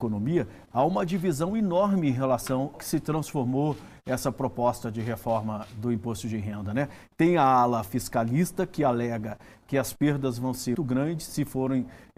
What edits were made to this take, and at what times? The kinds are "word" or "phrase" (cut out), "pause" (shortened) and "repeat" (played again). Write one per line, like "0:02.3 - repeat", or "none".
0:02.7 - word
0:10.7 - word